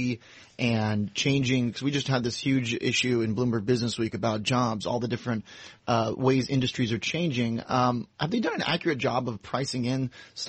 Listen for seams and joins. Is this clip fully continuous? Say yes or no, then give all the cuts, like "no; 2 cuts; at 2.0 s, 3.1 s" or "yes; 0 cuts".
yes; 0 cuts